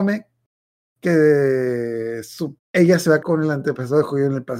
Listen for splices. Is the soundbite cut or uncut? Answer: cut